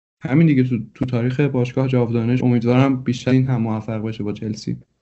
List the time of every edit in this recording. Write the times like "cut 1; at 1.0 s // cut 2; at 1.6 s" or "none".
cut 1; at 2.4 s // cut 2; at 3.3 s